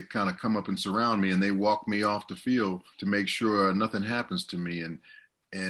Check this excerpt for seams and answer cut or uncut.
cut